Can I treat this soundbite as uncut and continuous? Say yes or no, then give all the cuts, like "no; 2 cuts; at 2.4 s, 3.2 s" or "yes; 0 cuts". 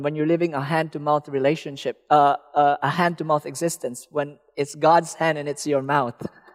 yes; 0 cuts